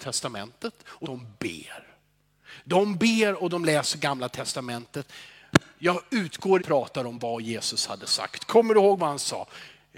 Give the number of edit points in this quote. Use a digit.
3